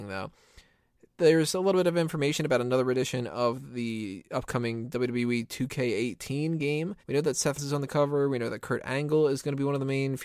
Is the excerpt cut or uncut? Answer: cut